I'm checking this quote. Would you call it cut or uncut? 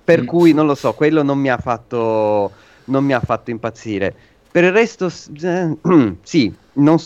uncut